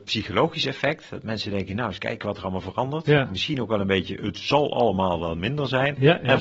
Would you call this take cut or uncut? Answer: uncut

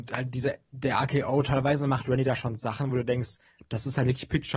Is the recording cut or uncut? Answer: uncut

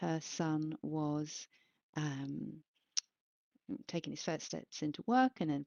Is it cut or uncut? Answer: uncut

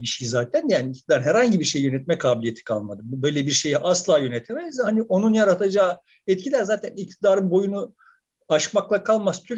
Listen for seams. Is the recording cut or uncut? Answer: uncut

